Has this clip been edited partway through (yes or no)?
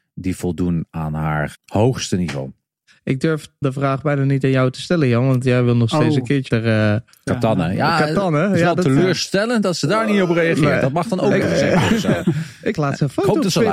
yes